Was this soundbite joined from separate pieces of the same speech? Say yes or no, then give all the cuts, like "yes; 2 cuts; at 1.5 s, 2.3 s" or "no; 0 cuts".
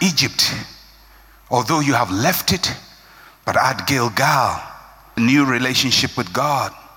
yes; 1 cut; at 5.2 s